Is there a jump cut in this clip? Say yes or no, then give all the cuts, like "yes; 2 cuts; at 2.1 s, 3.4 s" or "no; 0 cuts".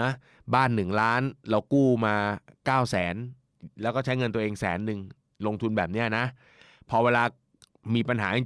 no; 0 cuts